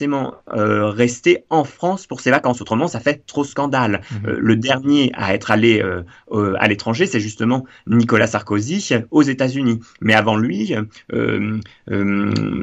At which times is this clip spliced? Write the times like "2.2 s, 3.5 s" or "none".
none